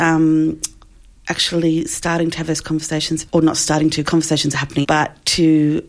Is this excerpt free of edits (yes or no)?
no